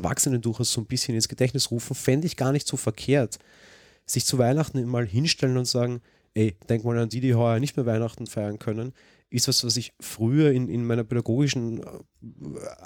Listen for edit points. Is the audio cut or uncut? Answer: uncut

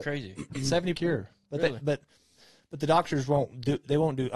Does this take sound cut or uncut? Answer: cut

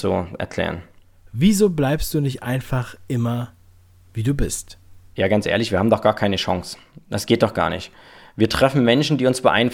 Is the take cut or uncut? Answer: uncut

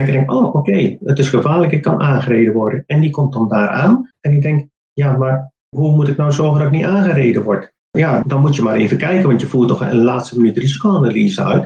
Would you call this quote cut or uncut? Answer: cut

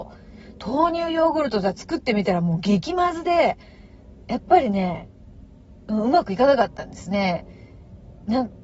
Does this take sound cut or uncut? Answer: uncut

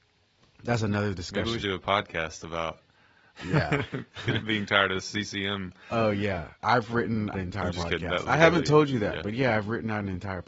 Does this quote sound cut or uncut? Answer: cut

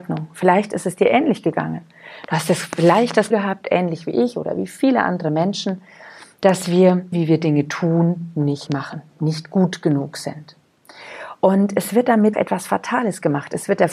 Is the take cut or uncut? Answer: cut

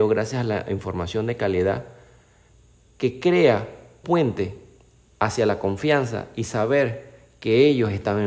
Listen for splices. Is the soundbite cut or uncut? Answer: cut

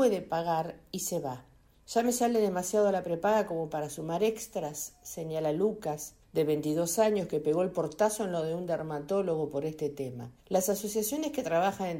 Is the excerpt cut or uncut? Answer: cut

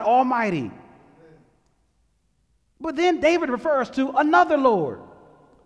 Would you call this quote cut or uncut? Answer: uncut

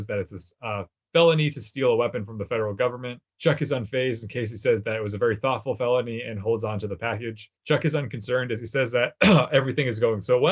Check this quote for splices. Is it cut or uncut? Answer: cut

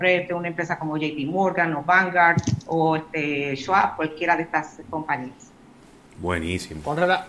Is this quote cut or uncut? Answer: uncut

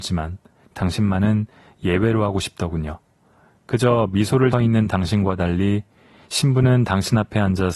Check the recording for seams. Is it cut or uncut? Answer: cut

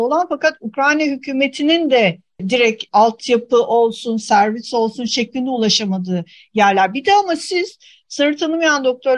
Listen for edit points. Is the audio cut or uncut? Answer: uncut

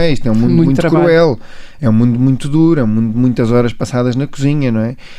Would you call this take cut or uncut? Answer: uncut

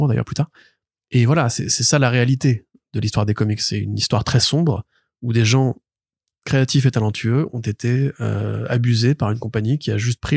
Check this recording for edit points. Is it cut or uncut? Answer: uncut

